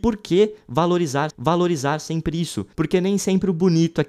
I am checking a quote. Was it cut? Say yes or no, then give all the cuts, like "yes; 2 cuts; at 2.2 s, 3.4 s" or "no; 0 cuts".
yes; 2 cuts; at 1.3 s, 2.7 s